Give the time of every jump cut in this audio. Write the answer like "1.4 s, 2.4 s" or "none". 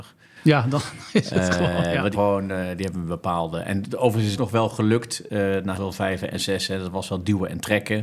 2.1 s, 4.3 s, 5.7 s